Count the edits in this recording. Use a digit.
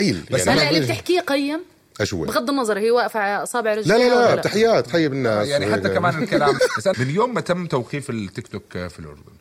3